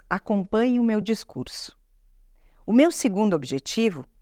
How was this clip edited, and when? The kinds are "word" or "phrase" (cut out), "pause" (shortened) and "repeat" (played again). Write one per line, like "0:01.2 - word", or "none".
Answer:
none